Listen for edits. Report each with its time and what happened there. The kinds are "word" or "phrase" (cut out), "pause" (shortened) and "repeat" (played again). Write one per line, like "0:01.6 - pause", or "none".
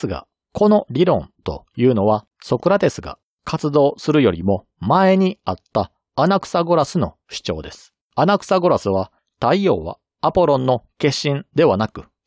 0:02.3 - pause
0:08.0 - pause
0:09.2 - pause